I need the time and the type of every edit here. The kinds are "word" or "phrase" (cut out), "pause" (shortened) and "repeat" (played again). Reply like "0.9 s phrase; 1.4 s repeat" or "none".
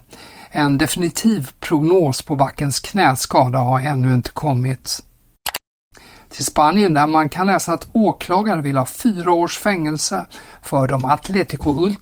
none